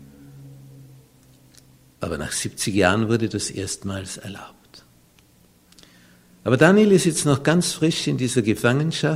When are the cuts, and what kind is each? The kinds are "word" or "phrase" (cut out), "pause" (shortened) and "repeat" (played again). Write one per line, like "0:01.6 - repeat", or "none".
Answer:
none